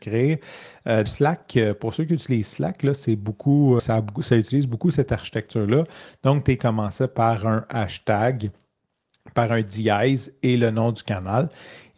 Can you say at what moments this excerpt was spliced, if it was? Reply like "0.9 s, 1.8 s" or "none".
1.1 s, 3.8 s, 6.6 s

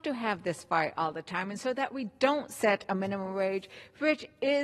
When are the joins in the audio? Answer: none

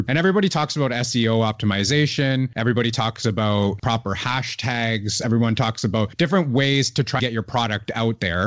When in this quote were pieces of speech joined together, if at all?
7.2 s

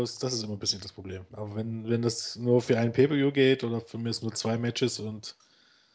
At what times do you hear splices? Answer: none

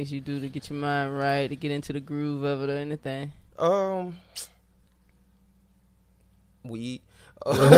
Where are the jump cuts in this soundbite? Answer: none

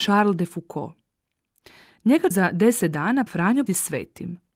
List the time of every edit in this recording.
2.3 s, 3.3 s, 3.7 s

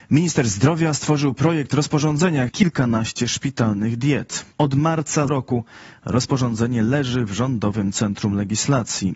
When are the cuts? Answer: 2.5 s, 4.5 s, 5.3 s

